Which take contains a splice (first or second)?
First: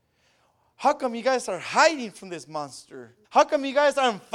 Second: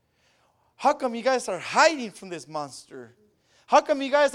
first